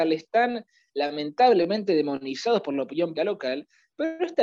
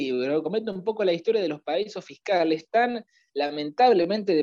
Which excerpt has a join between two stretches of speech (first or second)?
first